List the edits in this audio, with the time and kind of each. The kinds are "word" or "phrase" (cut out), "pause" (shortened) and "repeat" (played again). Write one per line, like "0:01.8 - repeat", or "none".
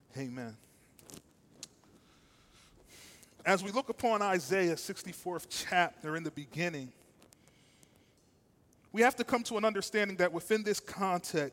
none